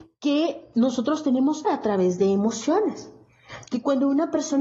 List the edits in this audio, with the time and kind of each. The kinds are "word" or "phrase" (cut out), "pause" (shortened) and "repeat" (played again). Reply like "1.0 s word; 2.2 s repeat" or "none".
1.6 s word